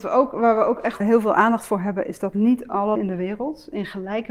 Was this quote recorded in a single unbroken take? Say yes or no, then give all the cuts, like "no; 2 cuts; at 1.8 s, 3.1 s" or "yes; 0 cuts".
no; 2 cuts; at 1.0 s, 3.0 s